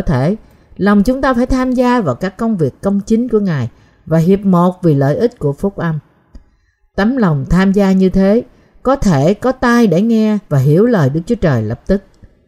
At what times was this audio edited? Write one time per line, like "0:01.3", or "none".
0:10.5